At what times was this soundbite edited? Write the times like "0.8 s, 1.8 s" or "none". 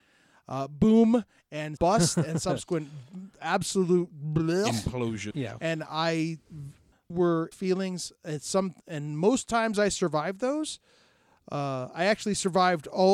1.8 s, 5.3 s, 7.1 s, 7.5 s